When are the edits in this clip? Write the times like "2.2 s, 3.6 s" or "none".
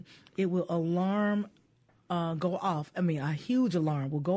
none